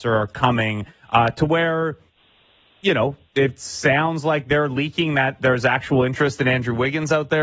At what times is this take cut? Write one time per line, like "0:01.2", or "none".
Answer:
none

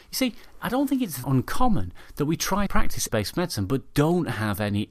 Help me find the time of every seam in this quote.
0:01.2
0:02.7
0:03.1

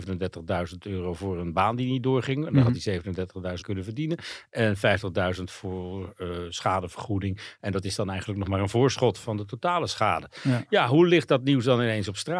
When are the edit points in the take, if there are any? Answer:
0:03.6

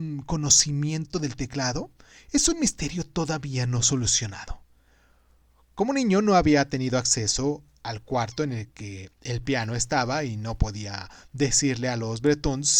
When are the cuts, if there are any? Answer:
none

